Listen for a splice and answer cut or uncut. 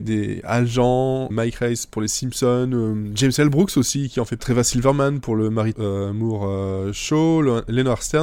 cut